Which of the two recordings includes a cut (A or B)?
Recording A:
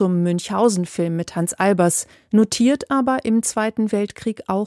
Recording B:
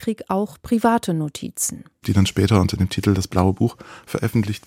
A